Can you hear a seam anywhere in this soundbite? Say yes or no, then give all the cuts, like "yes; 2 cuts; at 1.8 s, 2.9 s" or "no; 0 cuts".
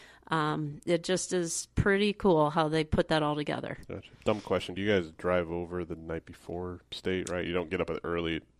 yes; 1 cut; at 4.1 s